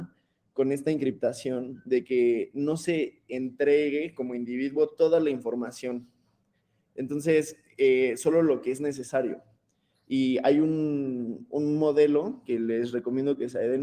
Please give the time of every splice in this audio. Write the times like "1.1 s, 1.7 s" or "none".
none

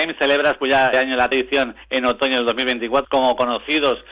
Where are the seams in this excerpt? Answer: 0.9 s, 1.3 s, 3.0 s

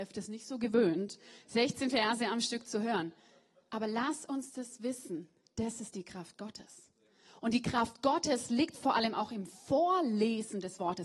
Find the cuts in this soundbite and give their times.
none

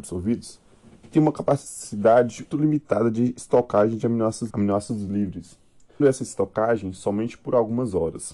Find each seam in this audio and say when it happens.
1.1 s, 2.5 s, 4.5 s, 6.0 s

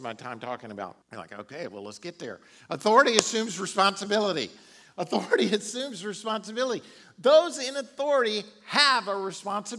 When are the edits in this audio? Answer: 1.0 s

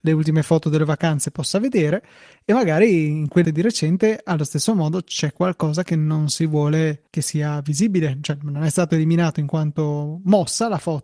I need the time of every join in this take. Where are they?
3.4 s, 7.1 s

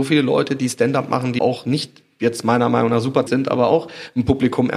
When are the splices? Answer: 1.4 s, 3.3 s

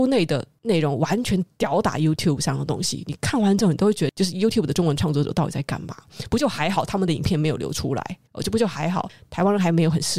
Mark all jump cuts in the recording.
8.3 s

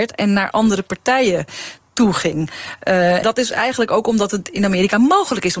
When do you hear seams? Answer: 3.2 s

